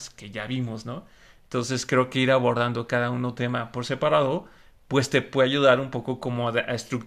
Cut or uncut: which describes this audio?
uncut